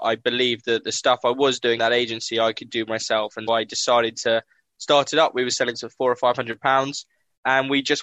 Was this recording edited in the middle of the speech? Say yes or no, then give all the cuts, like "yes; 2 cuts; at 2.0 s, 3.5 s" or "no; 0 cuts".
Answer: yes; 3 cuts; at 1.8 s, 3.5 s, 5.7 s